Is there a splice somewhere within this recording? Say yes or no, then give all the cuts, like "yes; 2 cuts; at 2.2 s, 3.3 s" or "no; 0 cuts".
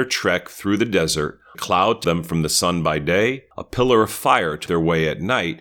yes; 4 cuts; at 1.5 s, 2.0 s, 3.5 s, 4.7 s